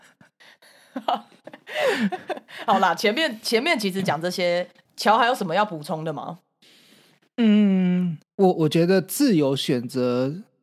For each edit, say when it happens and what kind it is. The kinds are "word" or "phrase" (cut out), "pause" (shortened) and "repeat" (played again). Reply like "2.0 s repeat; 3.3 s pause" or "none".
4.8 s word; 8.2 s pause